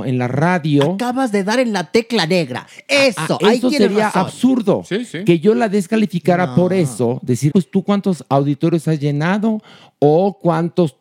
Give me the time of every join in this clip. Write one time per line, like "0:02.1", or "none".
0:07.5

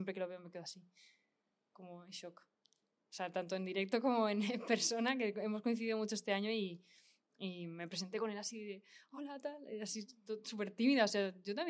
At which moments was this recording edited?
none

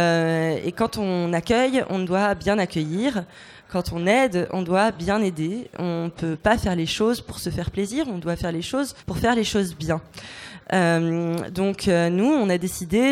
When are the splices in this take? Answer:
0:09.0

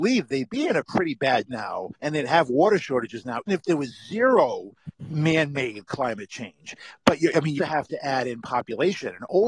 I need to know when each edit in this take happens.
0:01.5
0:01.9
0:03.5
0:04.9
0:07.6

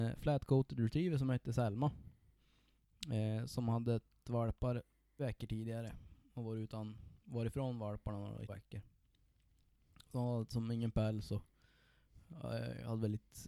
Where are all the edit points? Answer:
0:04.2
0:05.2
0:08.5

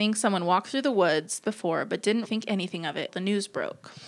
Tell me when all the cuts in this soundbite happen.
0:01.4
0:02.2
0:03.1

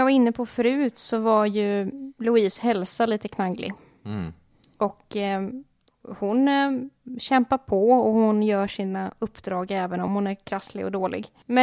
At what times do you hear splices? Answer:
none

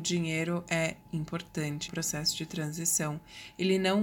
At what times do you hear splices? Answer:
0:01.9

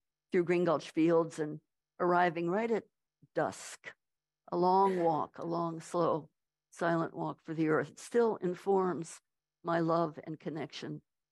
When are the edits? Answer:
none

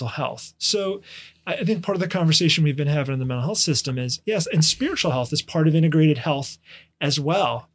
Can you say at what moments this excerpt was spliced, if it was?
none

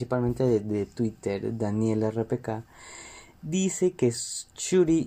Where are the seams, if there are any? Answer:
none

